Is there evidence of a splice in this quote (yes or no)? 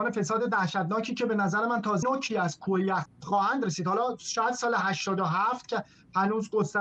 yes